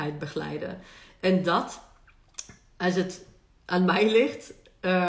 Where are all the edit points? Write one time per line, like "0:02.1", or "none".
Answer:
none

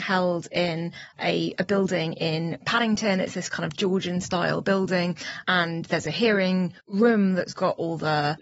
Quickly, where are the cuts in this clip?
0:01.1
0:06.8

